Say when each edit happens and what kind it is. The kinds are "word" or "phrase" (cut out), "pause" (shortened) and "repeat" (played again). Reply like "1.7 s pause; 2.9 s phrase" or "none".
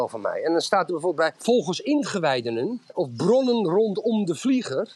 1.3 s word; 2.9 s word